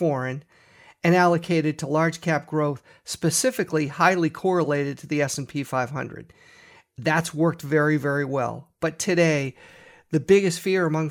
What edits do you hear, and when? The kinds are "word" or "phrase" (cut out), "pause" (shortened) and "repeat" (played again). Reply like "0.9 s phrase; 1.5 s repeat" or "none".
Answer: none